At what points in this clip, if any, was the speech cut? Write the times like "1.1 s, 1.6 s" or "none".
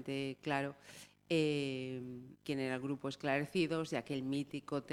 2.4 s